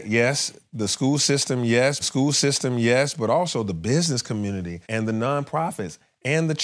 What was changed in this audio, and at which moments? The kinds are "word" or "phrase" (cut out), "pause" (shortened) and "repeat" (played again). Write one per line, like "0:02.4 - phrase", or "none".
0:02.0 - repeat
0:04.8 - pause

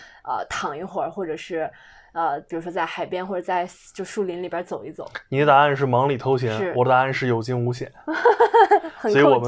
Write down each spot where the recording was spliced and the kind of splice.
none

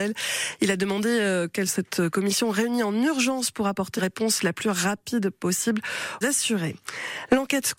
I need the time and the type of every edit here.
0:01.7 - word
0:04.0 - word
0:06.2 - word

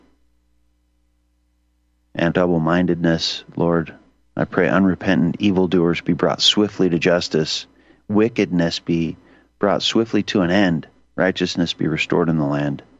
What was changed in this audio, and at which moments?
0:02.3 - word

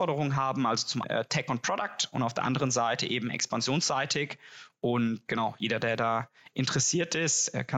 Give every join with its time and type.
0:01.0 - word
0:05.3 - word

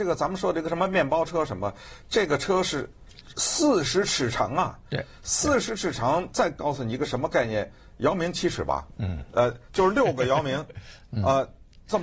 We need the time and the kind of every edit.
none

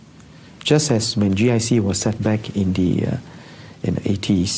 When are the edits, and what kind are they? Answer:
0:02.2 - word

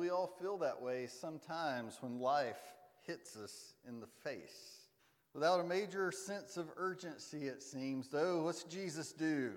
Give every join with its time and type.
0:05.0 - pause

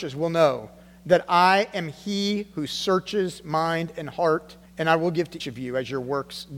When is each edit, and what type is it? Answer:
0:04.7 - pause
0:05.4 - word

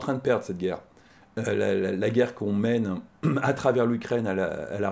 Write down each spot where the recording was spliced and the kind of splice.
none

